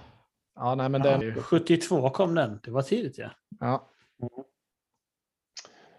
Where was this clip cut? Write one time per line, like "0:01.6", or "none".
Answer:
0:01.2

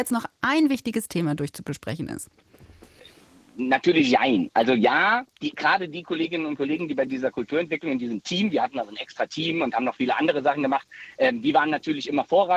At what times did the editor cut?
none

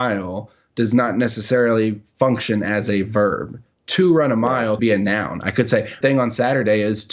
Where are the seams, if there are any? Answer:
0:04.8
0:06.0

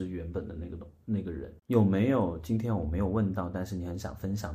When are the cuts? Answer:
0:01.6

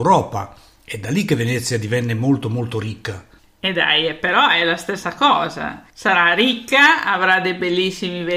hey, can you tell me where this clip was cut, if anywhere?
0:03.4
0:05.9

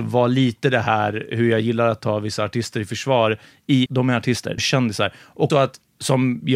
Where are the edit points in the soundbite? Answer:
0:03.9
0:04.6
0:05.5

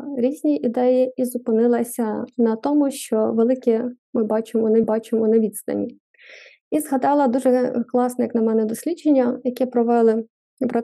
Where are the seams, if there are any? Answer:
0:04.8

